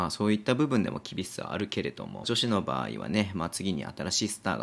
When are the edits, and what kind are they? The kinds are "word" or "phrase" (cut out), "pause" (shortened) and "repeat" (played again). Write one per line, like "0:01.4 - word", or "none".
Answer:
0:02.2 - phrase